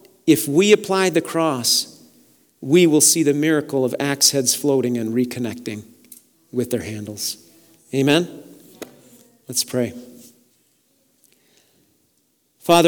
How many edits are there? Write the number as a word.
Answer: zero